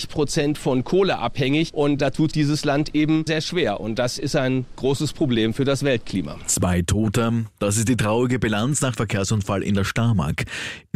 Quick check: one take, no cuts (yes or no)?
no